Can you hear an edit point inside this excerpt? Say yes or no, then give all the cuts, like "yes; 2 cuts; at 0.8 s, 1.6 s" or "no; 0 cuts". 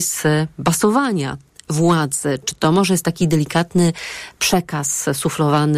no; 0 cuts